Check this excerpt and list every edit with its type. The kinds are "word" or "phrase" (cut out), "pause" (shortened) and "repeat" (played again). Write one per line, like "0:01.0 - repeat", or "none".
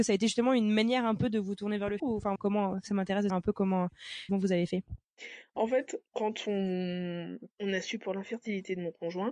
0:02.0 - word
0:02.4 - word
0:03.3 - word
0:04.3 - word
0:07.5 - pause